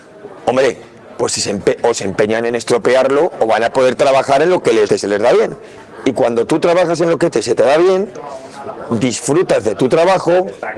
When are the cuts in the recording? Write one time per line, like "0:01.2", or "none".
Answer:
0:04.9
0:07.3

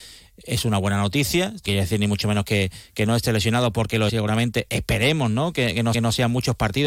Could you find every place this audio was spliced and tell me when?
0:01.7
0:04.1
0:05.9

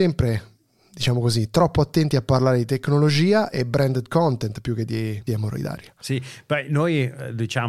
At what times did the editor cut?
0:05.3

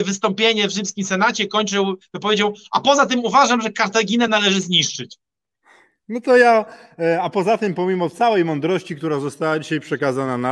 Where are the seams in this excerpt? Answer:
none

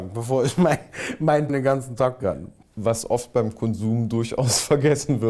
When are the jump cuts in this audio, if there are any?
0:01.5
0:02.2

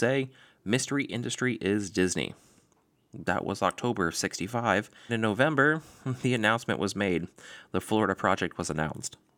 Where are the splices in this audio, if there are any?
0:05.1

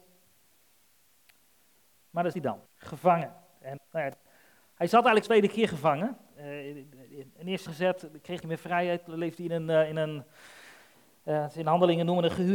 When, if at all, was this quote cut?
0:02.3
0:02.7
0:03.8
0:05.2
0:07.7
0:08.4

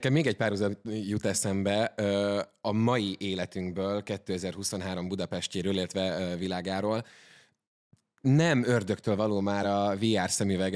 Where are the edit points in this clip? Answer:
none

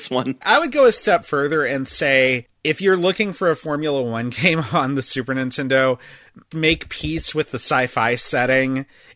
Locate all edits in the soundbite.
0:06.5

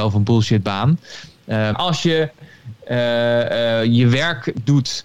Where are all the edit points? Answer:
0:01.7

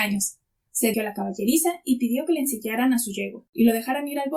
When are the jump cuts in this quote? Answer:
0:00.9

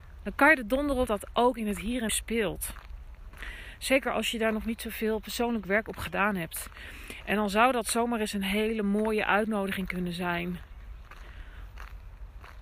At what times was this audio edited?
0:01.1
0:02.1

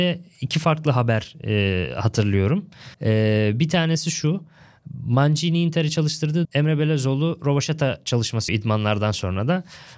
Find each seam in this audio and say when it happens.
0:02.9
0:06.4
0:08.5

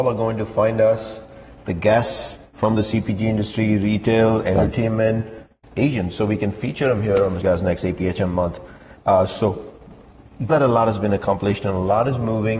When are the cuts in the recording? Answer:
0:07.4
0:10.5

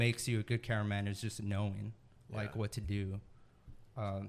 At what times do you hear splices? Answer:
none

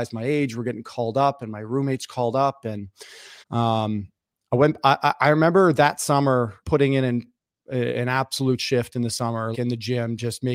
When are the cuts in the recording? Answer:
0:03.4
0:06.6
0:09.5

